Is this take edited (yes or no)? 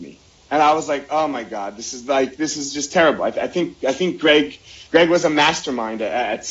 yes